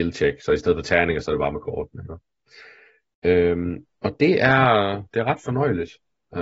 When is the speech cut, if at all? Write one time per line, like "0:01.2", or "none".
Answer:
none